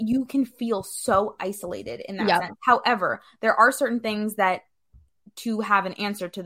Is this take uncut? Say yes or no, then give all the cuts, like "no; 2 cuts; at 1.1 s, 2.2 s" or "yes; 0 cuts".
yes; 0 cuts